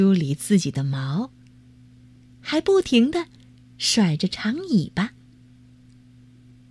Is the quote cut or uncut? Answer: uncut